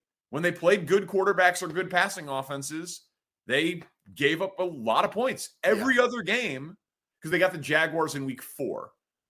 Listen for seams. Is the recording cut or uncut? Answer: uncut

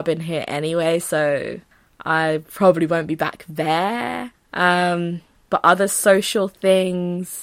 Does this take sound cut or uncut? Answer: uncut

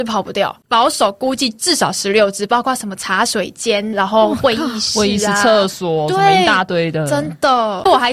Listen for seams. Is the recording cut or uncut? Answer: cut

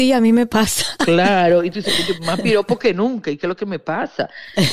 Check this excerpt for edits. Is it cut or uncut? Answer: uncut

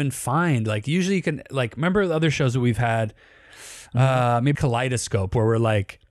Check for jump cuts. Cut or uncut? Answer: cut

